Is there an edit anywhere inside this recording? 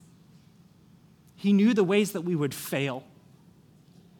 no; 0 cuts

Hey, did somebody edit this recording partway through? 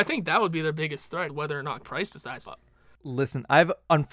yes; 3 cuts; at 1.3 s, 1.8 s, 2.5 s

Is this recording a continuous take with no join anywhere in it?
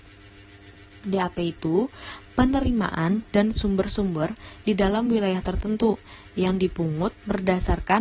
yes; 0 cuts

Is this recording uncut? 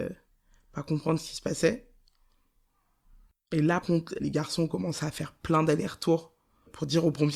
no; 2 cuts; at 3.8 s, 4.2 s

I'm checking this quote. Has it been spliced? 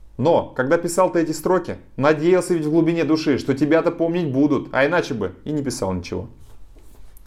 no; 0 cuts

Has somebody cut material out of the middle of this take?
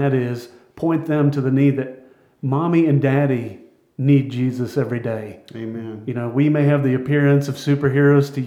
no; 0 cuts

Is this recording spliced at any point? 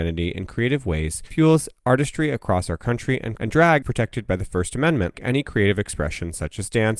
yes; 3 cuts; at 3.4 s, 3.8 s, 5.1 s

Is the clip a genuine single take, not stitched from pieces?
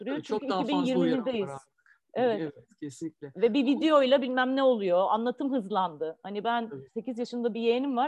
yes; 0 cuts

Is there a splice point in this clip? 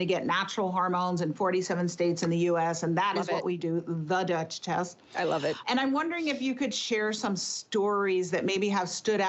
no; 0 cuts

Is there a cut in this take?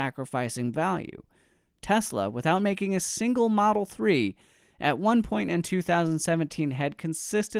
no; 0 cuts

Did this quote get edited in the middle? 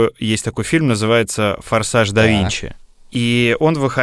no; 0 cuts

